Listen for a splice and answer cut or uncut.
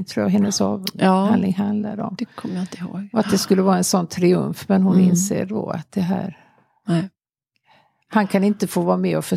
uncut